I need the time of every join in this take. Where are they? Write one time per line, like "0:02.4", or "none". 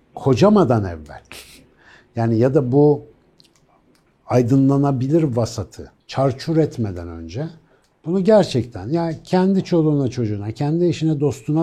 0:06.0

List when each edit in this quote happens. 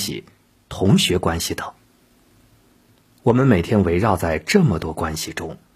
none

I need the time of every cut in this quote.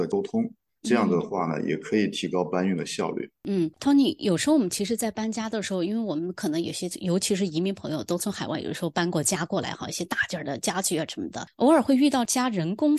0:03.4

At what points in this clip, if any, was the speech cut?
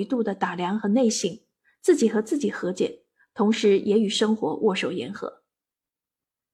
none

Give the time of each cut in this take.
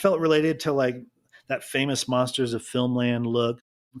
none

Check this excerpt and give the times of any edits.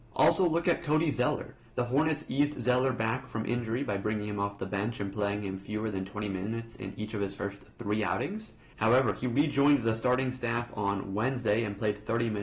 none

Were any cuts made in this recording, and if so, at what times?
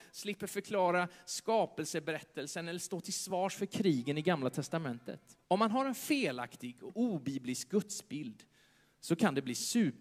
0:05.4

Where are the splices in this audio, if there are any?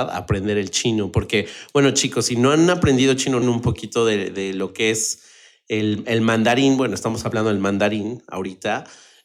0:03.4

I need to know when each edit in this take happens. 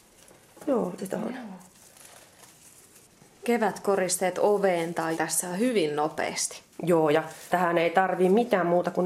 0:01.0
0:05.2
0:06.7
0:07.5

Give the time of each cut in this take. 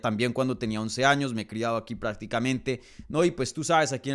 none

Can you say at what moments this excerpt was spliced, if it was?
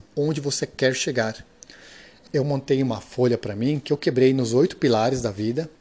0:02.3

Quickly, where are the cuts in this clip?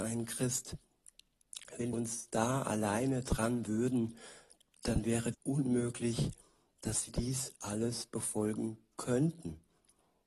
0:01.9
0:03.7
0:05.3
0:07.1

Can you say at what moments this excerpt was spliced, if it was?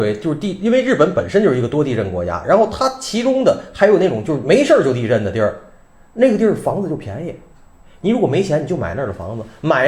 none

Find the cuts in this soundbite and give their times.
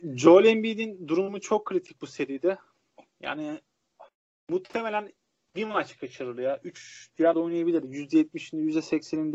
0:07.3

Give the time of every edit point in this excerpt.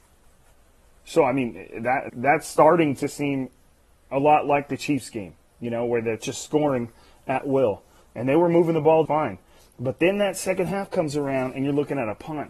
0:02.1
0:09.1

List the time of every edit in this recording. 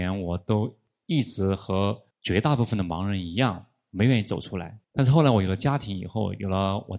0:02.1
0:04.8

